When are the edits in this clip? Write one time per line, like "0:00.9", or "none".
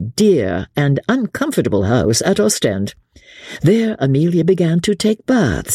none